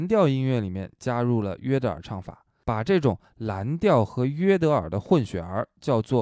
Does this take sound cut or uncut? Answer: uncut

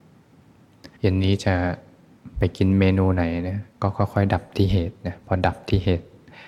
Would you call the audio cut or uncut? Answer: cut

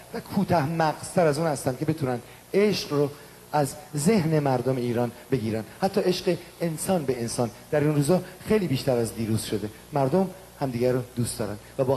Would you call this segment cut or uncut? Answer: uncut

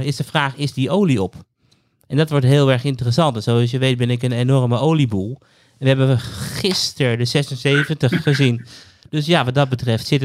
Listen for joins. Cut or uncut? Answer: uncut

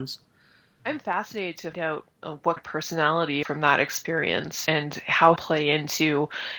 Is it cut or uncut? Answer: cut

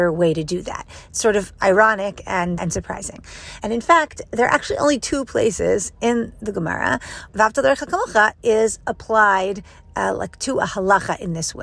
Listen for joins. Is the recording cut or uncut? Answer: cut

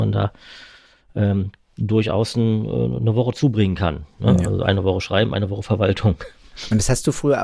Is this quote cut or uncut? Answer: uncut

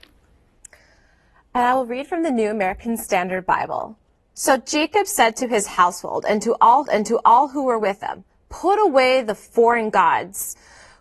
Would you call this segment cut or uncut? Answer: cut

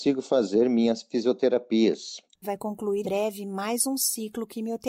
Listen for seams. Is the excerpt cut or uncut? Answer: cut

